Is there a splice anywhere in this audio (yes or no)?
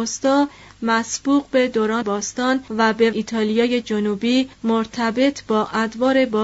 yes